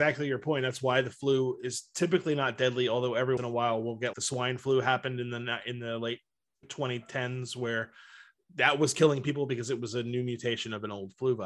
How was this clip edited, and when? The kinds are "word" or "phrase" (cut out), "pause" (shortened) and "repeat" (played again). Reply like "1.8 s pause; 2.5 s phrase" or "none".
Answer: 3.4 s word; 4.1 s word; 6.6 s word